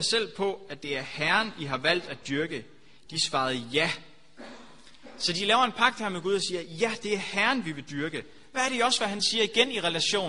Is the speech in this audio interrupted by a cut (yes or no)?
no